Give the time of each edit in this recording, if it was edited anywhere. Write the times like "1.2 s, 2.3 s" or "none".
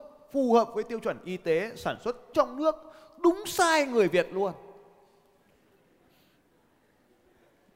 2.3 s

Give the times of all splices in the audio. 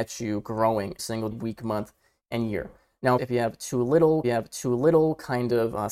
1.0 s, 1.3 s, 3.2 s, 4.2 s

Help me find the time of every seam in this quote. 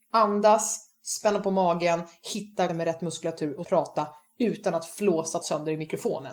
2.7 s, 3.6 s, 5.4 s

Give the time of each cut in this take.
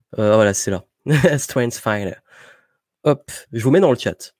none

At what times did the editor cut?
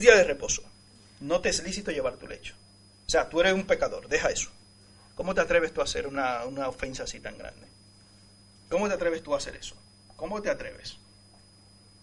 none

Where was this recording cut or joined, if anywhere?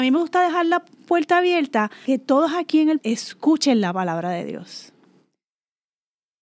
2.0 s, 3.0 s

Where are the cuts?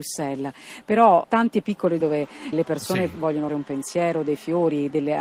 1.2 s, 2.0 s, 2.5 s, 3.5 s

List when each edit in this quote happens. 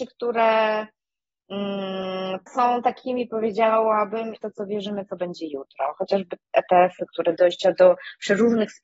2.5 s, 4.3 s, 7.4 s

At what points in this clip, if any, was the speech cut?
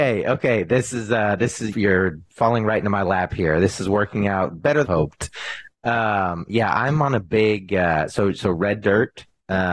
1.7 s, 2.3 s, 4.8 s

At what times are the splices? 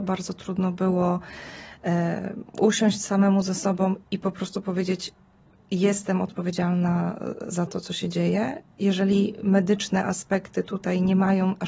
2.5 s, 4.0 s

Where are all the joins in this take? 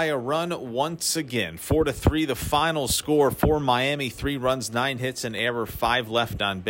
none

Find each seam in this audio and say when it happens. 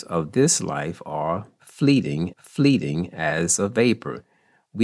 2.3 s

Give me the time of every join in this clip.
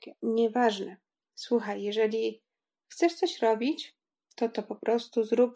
none

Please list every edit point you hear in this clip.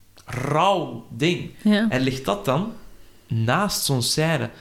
none

